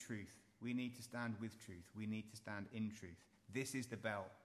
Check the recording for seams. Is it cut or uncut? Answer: uncut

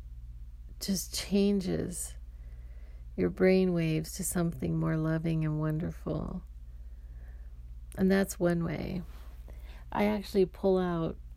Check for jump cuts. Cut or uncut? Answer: uncut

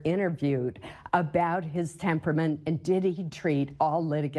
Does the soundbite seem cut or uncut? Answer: uncut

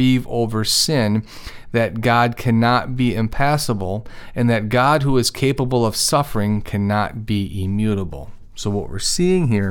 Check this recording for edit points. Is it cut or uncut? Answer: uncut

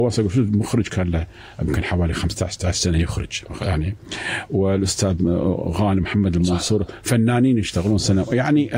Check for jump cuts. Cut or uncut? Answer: uncut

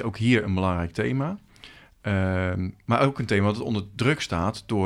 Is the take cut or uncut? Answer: uncut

